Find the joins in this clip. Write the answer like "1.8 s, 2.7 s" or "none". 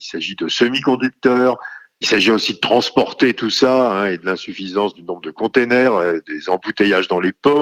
2.0 s